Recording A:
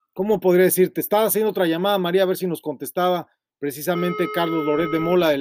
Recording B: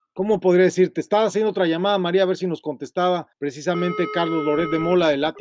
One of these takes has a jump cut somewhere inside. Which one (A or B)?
B